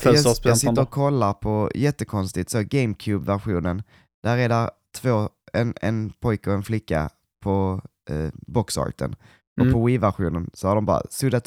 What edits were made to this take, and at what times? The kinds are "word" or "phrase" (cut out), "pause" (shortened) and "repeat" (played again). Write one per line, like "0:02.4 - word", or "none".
none